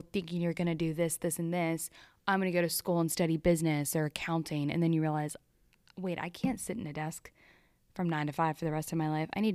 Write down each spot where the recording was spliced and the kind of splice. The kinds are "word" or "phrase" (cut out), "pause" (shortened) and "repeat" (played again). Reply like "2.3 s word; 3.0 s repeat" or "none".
none